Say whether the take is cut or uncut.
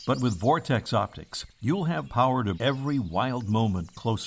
cut